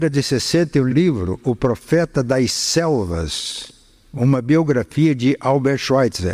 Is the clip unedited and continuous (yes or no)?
no